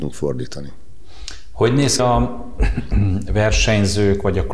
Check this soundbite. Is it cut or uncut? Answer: cut